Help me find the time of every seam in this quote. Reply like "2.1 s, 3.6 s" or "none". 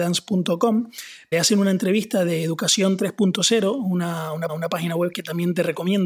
1.3 s, 4.5 s